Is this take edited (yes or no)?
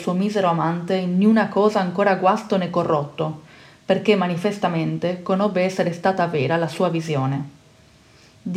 no